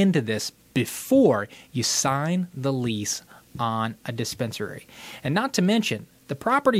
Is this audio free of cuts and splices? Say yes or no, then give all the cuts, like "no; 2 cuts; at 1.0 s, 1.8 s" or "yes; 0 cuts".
yes; 0 cuts